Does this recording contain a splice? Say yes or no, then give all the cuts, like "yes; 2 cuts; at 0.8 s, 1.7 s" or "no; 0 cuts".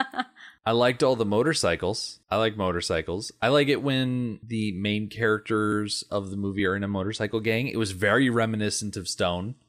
no; 0 cuts